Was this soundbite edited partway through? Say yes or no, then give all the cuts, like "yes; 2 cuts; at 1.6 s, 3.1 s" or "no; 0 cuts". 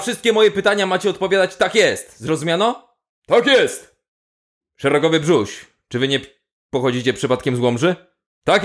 no; 0 cuts